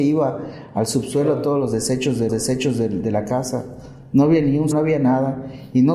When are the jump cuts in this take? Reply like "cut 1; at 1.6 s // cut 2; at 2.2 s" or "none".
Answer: cut 1; at 2.3 s // cut 2; at 4.7 s